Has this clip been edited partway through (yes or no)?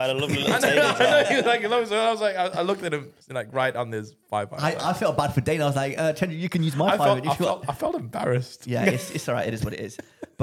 yes